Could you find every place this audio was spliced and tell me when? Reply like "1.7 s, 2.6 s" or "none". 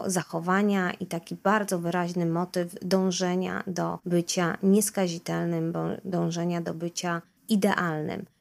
none